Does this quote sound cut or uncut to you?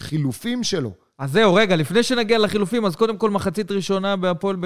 uncut